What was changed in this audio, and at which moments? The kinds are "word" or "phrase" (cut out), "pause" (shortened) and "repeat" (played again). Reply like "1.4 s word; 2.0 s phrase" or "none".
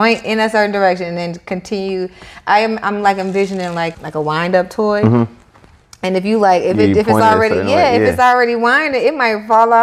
3.9 s word